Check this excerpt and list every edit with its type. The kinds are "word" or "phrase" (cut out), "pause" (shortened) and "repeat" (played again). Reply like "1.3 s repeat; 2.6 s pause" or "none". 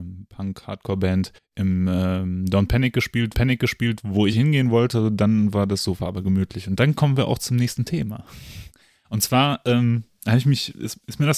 1.4 s pause; 3.3 s repeat; 4.3 s word